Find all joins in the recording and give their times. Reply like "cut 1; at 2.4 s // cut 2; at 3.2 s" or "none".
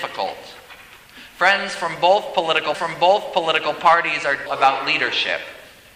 cut 1; at 2.7 s // cut 2; at 4.5 s